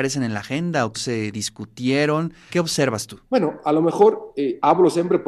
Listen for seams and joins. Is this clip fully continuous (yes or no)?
no